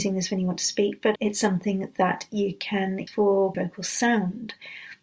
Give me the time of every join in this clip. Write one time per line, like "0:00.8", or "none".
0:01.2
0:03.1
0:03.5